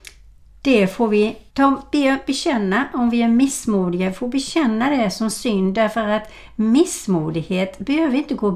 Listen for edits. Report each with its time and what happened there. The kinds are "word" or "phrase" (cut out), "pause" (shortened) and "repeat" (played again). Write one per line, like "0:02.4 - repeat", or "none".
0:01.5 - pause

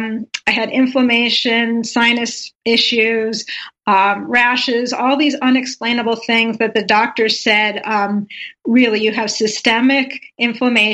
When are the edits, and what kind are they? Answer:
0:02.5 - pause

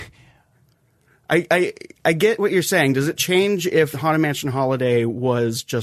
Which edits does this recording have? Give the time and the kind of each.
0:03.9 - word

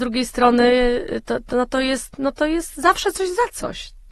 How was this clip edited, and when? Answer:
0:01.2 - word

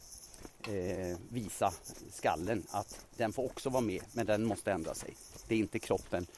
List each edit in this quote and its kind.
none

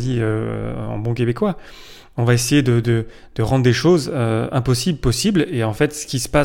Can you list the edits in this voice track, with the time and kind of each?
none

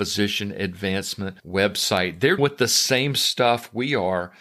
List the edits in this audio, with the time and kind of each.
0:02.4 - word

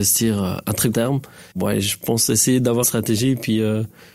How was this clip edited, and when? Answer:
0:00.9 - word
0:01.5 - pause
0:02.8 - word

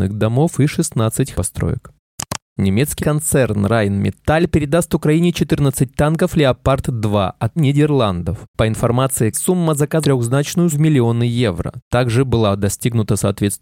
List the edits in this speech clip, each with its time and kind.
0:01.3 - word
0:03.0 - word
0:07.6 - word
0:09.3 - word
0:10.0 - word
0:10.7 - word

